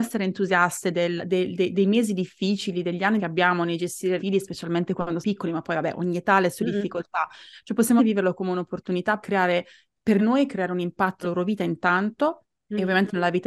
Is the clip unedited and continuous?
no; 8 cuts; at 1.2 s, 3.2 s, 4.2 s, 5.2 s, 8.0 s, 9.2 s, 10.2 s, 11.2 s

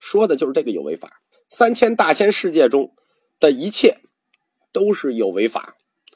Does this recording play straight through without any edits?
no; 1 cut; at 1.3 s

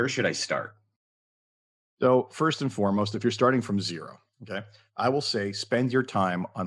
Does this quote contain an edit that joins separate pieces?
no; 0 cuts

